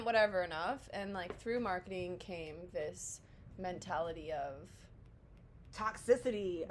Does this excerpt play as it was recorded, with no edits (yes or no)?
yes